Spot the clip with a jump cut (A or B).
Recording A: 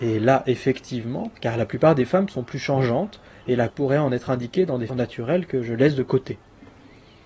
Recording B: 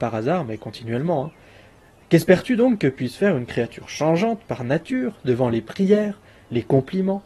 A